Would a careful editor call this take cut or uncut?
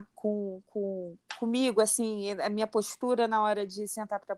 uncut